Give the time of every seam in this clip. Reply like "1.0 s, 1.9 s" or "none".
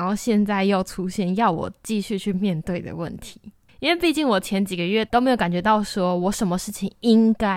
3.7 s